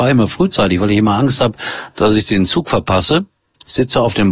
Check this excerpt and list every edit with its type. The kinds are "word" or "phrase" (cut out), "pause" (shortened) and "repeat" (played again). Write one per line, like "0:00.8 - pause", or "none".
none